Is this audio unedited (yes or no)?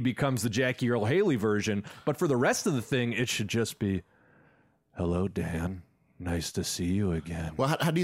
yes